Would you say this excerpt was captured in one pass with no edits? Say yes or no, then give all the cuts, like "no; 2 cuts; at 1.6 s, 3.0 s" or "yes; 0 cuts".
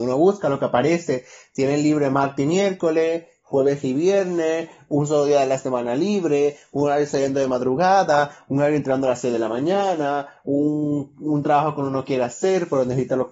yes; 0 cuts